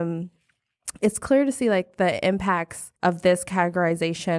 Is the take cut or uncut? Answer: cut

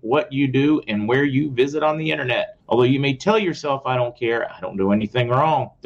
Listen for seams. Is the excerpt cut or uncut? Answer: cut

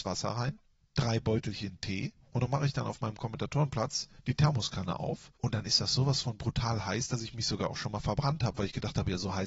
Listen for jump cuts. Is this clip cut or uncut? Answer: cut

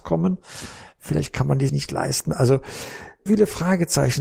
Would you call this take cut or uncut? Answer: cut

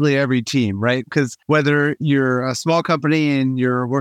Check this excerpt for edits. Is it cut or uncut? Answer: cut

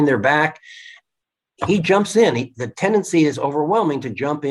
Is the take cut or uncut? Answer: uncut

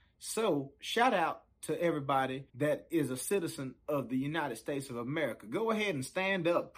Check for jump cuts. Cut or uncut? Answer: cut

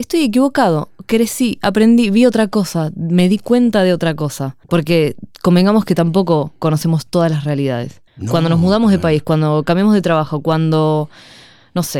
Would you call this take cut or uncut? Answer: cut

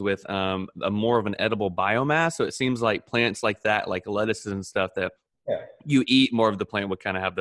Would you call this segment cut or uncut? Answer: uncut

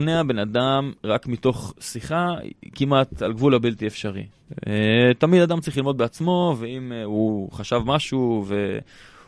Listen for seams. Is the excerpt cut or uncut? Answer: cut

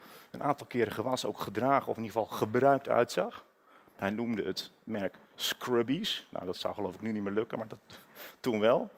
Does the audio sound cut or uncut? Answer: uncut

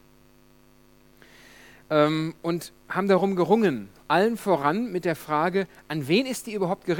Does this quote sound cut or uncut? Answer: uncut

